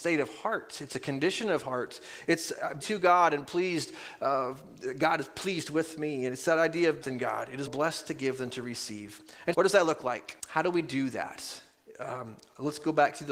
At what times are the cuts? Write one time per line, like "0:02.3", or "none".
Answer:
0:02.8
0:07.0
0:07.7
0:09.5
0:10.4